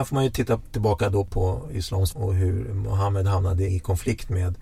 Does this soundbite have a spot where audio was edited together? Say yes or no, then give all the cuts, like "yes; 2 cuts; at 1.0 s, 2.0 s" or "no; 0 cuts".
yes; 2 cuts; at 2.1 s, 3.7 s